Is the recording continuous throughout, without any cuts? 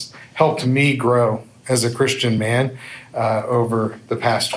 yes; 0 cuts

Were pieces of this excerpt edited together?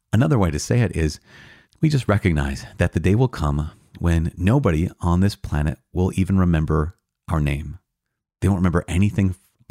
no; 0 cuts

